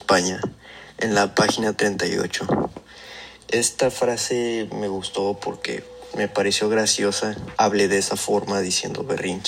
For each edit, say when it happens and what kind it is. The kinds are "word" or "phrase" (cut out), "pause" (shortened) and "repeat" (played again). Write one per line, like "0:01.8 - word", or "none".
0:03.4 - pause
0:06.1 - word
0:07.6 - word